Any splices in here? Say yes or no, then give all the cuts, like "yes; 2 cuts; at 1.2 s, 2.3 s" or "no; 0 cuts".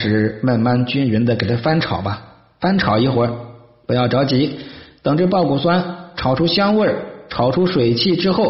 no; 0 cuts